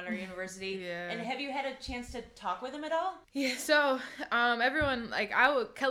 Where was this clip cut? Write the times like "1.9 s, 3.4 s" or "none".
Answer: 3.2 s